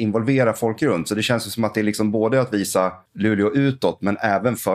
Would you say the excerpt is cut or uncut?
cut